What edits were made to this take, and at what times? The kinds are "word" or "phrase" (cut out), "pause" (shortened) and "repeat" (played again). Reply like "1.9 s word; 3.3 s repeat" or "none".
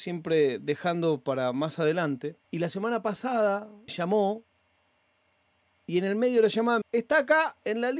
2.4 s pause; 3.9 s word; 6.8 s word